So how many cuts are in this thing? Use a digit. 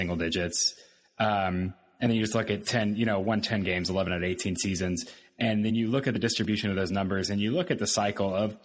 0